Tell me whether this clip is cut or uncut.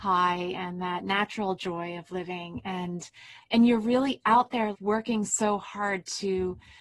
cut